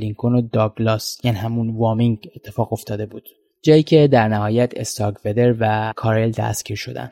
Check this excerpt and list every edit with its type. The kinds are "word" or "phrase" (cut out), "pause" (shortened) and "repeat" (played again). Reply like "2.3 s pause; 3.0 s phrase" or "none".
none